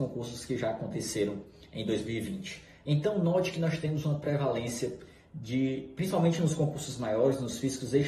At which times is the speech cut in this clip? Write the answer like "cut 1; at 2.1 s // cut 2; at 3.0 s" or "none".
none